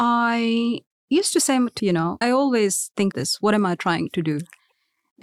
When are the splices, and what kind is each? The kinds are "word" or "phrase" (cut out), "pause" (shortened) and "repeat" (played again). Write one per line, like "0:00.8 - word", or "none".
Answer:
0:00.9 - pause
0:01.8 - word
0:02.2 - word
0:03.1 - word